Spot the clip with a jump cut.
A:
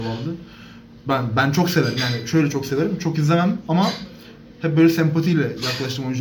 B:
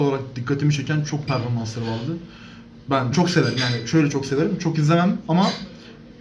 B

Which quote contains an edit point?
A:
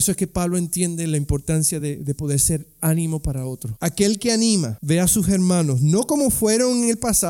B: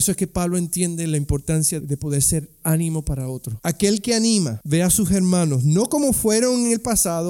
B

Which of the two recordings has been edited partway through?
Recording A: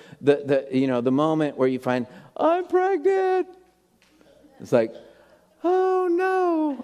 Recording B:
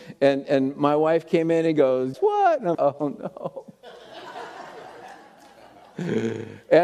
B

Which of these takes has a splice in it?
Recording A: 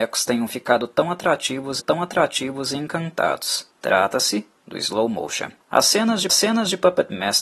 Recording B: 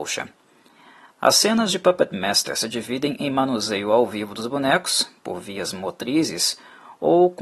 A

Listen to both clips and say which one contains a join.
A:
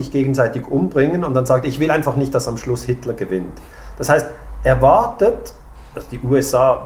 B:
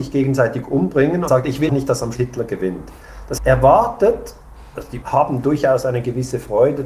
B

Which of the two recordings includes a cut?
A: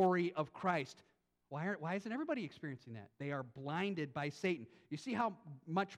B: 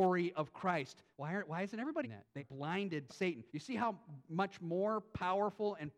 B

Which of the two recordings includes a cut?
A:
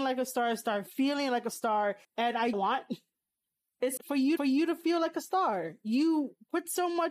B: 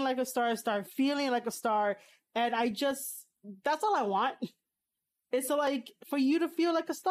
A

